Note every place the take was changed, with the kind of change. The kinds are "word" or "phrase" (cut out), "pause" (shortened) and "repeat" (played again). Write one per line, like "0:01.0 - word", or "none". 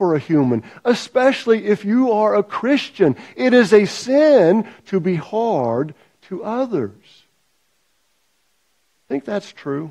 none